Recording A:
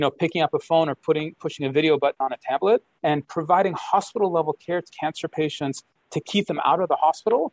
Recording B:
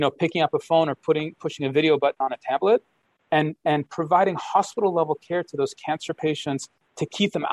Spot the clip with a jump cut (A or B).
A